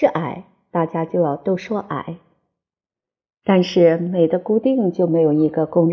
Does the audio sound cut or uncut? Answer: uncut